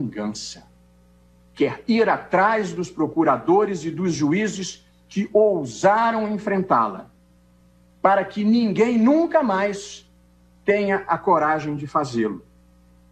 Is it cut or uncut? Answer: uncut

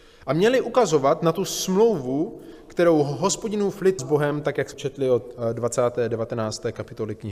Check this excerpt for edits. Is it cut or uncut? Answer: cut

